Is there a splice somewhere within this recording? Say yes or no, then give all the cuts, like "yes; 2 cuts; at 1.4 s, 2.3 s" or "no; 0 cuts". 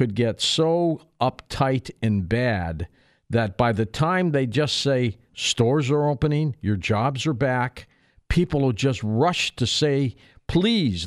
no; 0 cuts